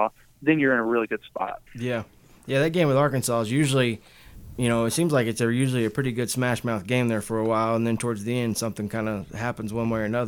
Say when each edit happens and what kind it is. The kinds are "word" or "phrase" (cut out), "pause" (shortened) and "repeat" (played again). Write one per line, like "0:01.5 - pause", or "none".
0:01.7 - pause